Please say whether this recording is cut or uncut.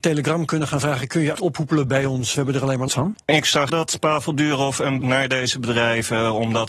cut